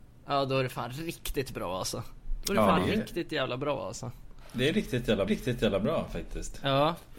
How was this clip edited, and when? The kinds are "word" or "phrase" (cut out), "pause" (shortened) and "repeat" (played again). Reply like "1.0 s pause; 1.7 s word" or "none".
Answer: 5.3 s repeat